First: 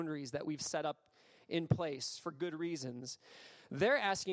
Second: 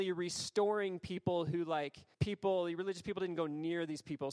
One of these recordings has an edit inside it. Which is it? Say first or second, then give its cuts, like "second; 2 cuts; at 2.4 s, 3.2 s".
second; 1 cut; at 2.1 s